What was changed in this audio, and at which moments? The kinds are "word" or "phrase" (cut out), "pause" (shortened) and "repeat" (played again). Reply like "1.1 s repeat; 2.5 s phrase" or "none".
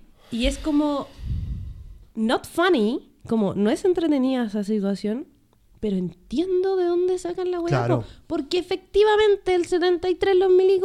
none